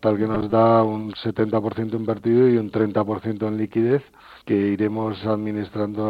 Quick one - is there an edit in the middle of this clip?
yes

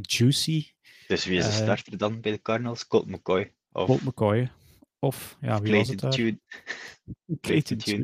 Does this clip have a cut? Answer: no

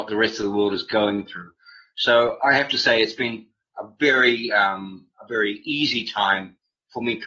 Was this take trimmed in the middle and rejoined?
no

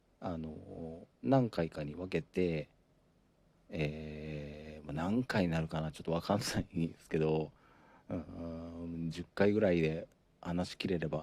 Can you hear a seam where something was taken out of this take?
yes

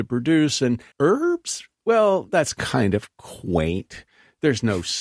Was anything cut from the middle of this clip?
yes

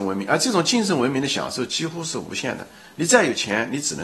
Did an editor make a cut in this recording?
no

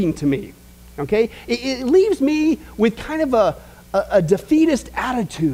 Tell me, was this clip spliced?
no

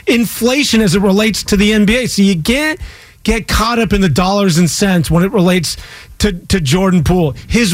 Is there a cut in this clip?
no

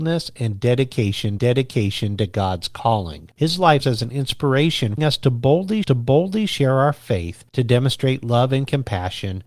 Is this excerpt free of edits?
no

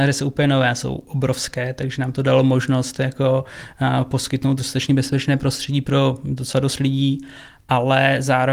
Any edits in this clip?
no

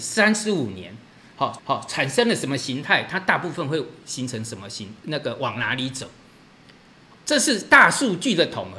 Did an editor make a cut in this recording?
yes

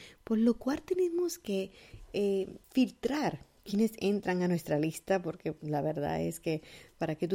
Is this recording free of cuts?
no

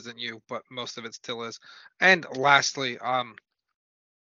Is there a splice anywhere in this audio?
no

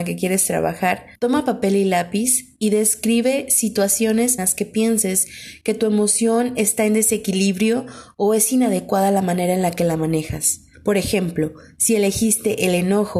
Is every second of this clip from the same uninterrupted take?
no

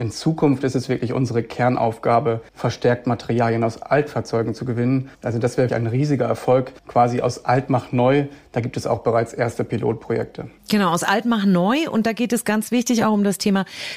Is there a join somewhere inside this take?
yes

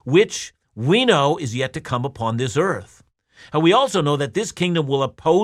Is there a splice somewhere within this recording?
no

